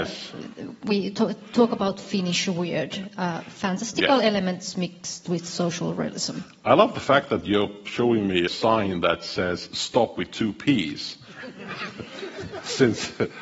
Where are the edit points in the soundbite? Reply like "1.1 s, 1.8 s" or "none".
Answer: 8.5 s